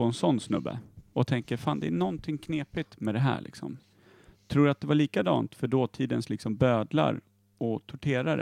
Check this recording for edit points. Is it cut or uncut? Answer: uncut